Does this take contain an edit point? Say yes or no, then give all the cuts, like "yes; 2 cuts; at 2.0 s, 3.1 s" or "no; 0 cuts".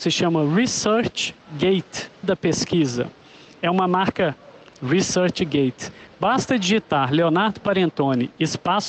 yes; 2 cuts; at 2.2 s, 4.7 s